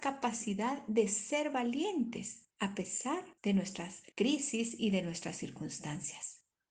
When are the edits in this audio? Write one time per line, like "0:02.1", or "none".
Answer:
0:02.5
0:03.4
0:04.1